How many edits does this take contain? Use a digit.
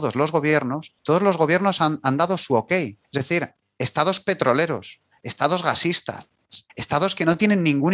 3